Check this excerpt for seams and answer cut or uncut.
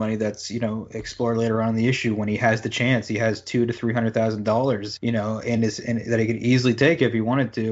uncut